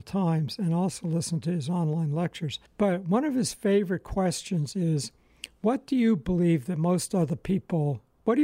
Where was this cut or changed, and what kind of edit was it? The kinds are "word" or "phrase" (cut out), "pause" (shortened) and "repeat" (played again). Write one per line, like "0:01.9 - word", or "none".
0:02.7 - pause